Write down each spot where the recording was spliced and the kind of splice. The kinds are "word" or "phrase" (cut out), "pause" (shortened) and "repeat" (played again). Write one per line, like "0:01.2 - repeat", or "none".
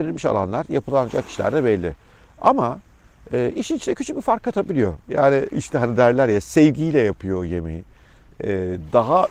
0:05.5 - word